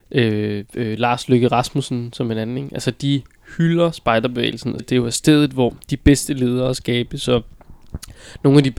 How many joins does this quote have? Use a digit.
2